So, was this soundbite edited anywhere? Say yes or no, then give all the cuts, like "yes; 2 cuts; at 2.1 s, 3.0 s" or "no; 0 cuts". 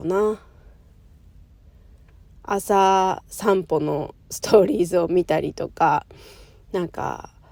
no; 0 cuts